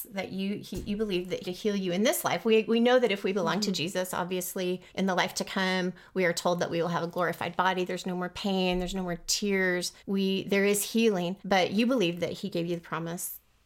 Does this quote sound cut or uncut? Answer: cut